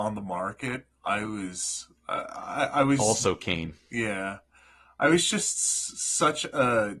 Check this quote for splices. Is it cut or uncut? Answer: uncut